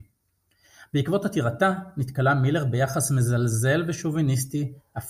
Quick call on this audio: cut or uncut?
uncut